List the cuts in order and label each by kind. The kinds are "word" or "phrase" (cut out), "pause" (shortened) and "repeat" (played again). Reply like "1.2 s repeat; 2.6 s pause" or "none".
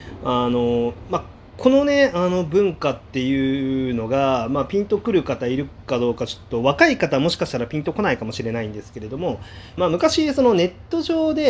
9.8 s phrase